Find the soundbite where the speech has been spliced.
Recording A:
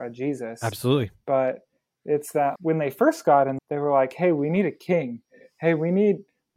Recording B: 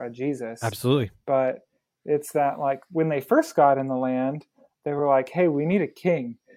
A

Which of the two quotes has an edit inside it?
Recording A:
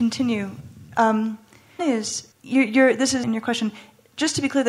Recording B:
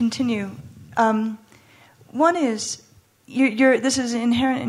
A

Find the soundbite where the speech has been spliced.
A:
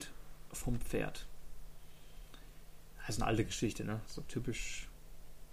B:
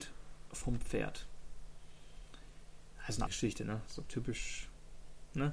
B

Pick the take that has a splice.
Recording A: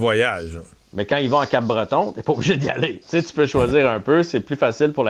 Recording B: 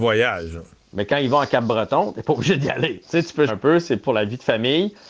B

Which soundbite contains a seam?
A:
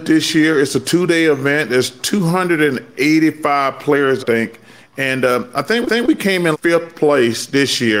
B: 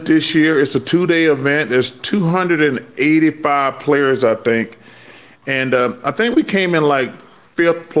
A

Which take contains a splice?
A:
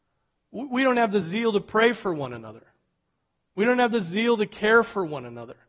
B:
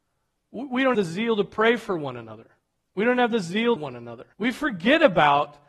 B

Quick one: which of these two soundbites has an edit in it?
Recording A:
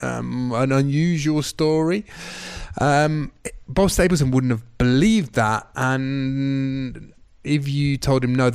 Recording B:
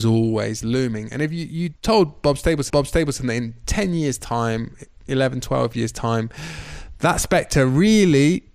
B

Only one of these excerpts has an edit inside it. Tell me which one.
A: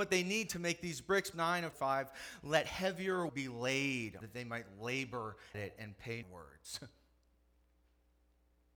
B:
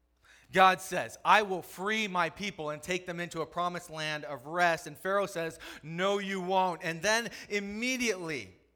A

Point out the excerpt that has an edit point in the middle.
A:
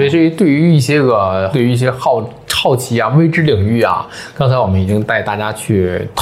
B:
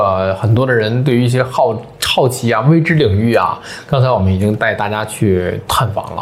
A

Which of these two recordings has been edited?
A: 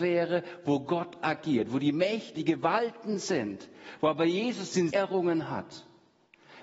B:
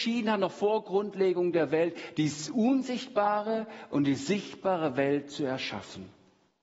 A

